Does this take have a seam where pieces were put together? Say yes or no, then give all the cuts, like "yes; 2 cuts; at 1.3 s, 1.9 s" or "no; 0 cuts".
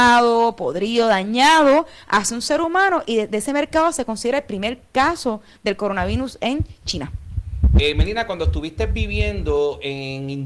no; 0 cuts